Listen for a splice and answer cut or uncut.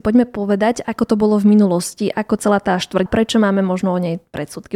cut